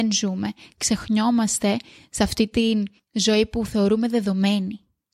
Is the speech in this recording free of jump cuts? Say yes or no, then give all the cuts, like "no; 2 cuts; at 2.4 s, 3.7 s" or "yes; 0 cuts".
yes; 0 cuts